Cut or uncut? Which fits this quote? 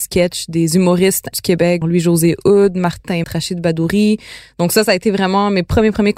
cut